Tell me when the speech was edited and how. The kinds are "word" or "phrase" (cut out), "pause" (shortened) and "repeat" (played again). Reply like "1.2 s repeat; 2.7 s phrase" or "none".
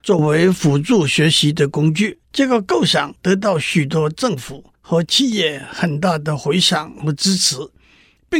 2.2 s pause